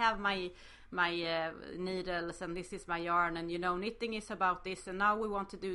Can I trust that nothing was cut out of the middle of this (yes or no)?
yes